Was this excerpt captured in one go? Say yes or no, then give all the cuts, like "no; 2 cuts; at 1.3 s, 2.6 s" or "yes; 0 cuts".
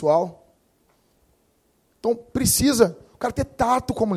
yes; 0 cuts